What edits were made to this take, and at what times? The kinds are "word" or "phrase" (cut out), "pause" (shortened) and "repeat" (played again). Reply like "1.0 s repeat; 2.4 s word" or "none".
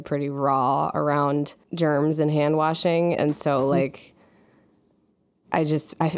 1.6 s pause